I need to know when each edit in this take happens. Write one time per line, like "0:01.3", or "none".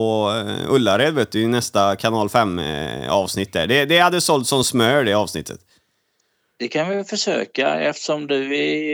none